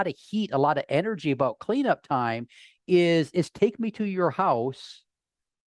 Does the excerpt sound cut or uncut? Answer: uncut